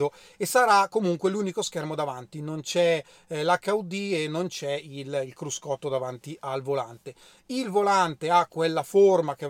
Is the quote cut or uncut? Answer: uncut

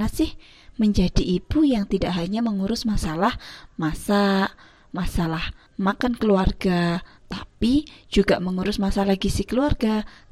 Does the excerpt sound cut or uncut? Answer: cut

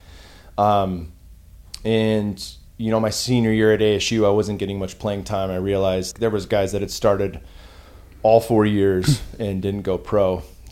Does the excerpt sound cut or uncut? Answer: cut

